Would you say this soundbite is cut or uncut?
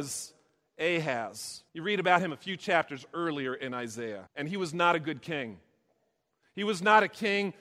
cut